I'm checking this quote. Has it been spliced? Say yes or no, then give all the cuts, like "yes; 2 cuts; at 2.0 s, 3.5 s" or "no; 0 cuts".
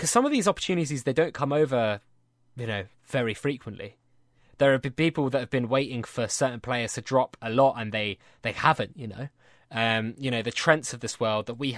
no; 0 cuts